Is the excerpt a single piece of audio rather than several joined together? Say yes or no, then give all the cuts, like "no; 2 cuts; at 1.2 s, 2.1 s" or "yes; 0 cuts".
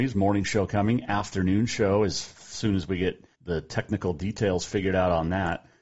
no; 1 cut; at 3.3 s